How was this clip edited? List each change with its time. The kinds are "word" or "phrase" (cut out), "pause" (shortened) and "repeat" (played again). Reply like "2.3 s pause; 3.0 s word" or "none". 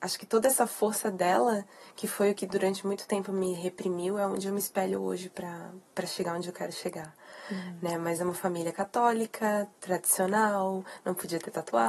none